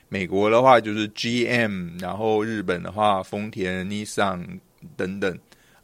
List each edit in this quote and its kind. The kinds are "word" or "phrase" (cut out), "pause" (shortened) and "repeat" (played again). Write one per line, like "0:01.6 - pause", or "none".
none